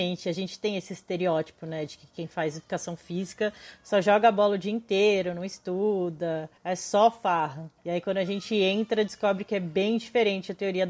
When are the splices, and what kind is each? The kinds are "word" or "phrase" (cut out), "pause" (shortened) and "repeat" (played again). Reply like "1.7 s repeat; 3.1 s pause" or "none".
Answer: 6.6 s pause; 7.8 s pause